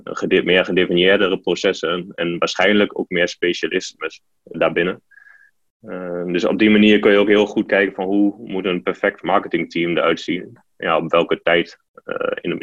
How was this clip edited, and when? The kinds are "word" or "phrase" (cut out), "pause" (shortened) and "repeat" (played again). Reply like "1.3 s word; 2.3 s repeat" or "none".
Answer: 4.5 s word